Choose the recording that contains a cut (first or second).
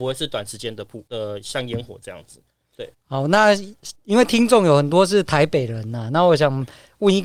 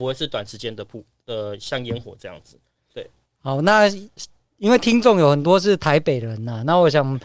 first